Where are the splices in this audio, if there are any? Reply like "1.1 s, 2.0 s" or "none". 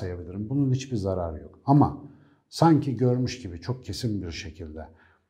none